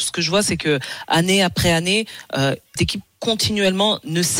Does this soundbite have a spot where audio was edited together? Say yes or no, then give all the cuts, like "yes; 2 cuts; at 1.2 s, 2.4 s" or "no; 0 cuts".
yes; 1 cut; at 2.8 s